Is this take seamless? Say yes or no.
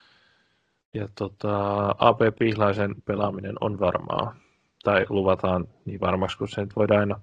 yes